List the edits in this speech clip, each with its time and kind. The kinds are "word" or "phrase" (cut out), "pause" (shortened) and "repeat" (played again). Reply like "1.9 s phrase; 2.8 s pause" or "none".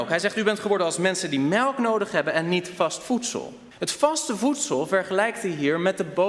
3.7 s pause